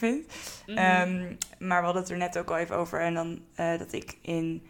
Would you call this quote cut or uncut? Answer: uncut